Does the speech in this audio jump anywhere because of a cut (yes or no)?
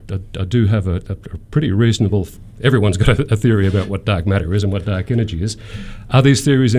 no